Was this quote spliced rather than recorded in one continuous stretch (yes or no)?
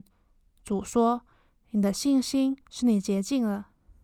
yes